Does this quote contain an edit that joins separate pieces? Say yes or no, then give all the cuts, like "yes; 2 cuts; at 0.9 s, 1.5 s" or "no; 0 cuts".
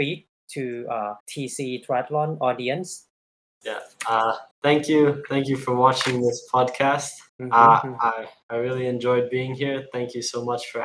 yes; 4 cuts; at 1.2 s, 3.4 s, 4.5 s, 7.3 s